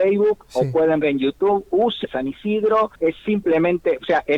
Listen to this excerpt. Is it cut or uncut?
cut